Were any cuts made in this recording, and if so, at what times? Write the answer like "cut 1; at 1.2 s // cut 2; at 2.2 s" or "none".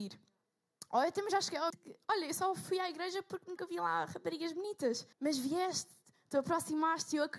cut 1; at 1.7 s // cut 2; at 3.6 s // cut 3; at 5.1 s

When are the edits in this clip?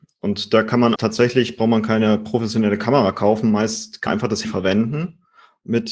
cut 1; at 1.0 s // cut 2; at 4.1 s // cut 3; at 4.4 s

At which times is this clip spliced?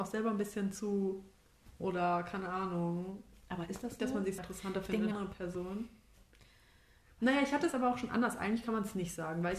cut 1; at 1.8 s // cut 2; at 4.4 s // cut 3; at 5.1 s

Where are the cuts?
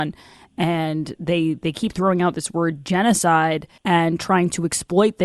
cut 1; at 3.8 s

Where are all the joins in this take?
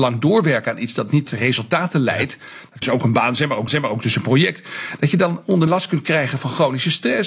cut 1; at 1.3 s // cut 2; at 2.8 s // cut 3; at 3.7 s // cut 4; at 5.7 s

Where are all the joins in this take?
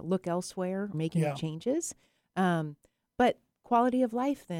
cut 1; at 0.9 s

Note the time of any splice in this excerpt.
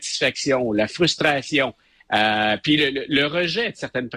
none

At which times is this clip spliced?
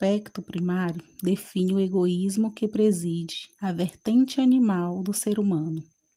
cut 1; at 3.5 s

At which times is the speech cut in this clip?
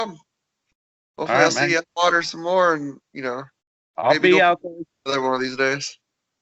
cut 1; at 1.8 s // cut 2; at 3.6 s

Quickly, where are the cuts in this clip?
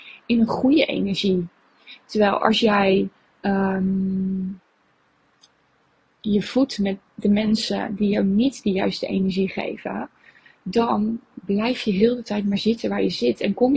none

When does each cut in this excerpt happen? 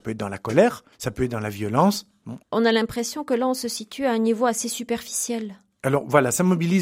cut 1; at 0.9 s // cut 2; at 2.4 s

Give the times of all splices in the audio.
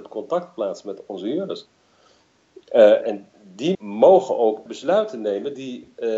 cut 1; at 3.0 s // cut 2; at 3.7 s // cut 3; at 4.7 s

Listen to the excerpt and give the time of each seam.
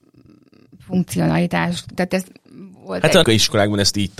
cut 1; at 2.0 s // cut 2; at 3.2 s

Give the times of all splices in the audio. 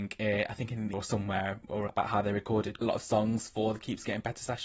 cut 1; at 0.9 s // cut 2; at 1.9 s // cut 3; at 2.8 s

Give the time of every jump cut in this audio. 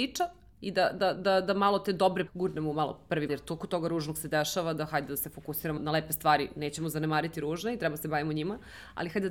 cut 1; at 1.1 s // cut 2; at 2.3 s // cut 3; at 3.3 s // cut 4; at 5.8 s

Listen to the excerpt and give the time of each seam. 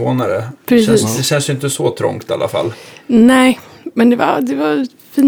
none

